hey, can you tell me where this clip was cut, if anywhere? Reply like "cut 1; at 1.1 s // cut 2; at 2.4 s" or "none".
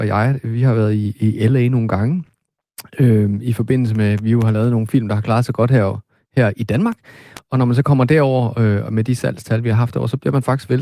none